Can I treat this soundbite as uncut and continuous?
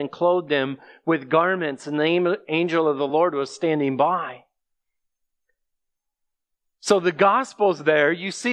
yes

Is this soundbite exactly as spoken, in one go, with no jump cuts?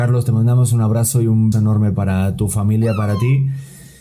no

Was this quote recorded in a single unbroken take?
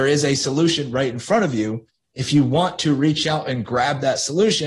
yes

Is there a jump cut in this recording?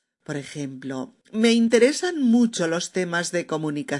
yes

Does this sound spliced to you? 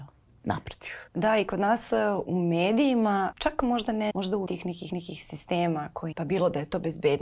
yes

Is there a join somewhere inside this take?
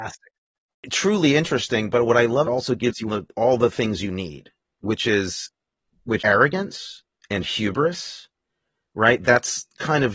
yes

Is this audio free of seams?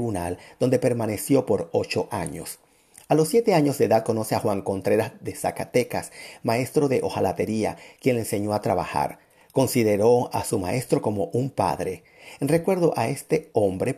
yes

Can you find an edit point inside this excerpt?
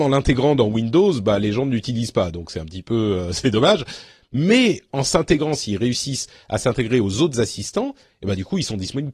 no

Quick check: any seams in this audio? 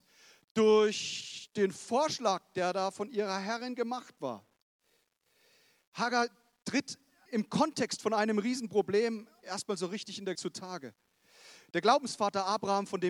yes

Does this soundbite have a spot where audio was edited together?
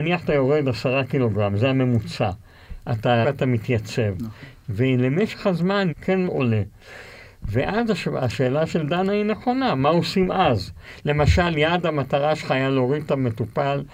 yes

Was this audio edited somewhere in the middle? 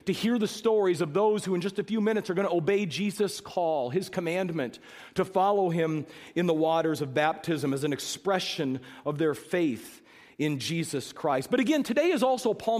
no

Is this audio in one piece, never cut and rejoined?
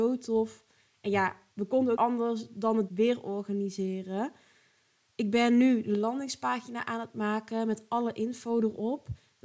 no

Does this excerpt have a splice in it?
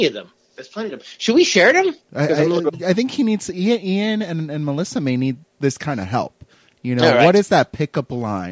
no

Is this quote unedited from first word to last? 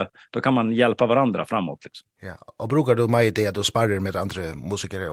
yes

